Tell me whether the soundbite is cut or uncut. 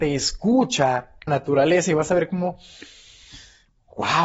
cut